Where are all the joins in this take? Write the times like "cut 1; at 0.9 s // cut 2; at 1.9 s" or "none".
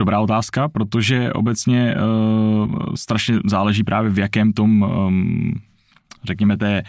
none